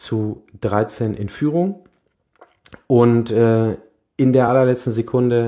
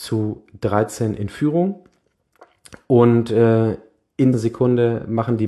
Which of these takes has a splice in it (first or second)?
second